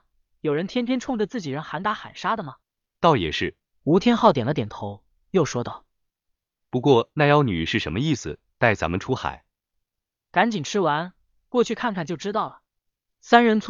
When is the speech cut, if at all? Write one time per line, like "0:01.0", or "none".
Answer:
0:02.6